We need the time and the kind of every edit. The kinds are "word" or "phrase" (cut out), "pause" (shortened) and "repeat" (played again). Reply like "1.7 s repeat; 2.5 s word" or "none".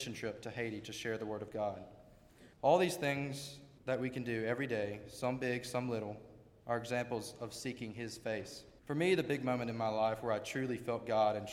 2.5 s pause; 3.8 s pause; 8.8 s pause